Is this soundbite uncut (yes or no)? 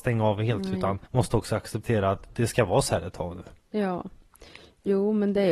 no